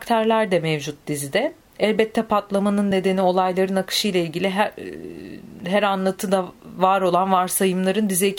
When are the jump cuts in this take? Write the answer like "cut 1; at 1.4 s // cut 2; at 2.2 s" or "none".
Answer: none